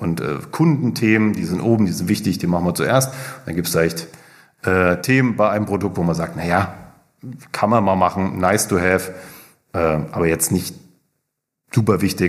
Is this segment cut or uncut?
uncut